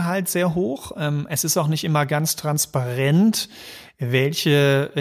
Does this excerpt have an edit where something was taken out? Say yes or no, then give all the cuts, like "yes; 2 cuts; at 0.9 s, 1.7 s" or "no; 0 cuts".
no; 0 cuts